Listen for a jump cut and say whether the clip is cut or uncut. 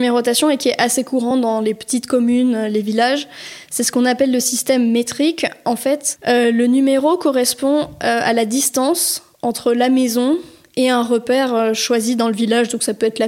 uncut